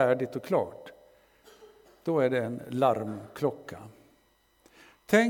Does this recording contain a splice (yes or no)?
no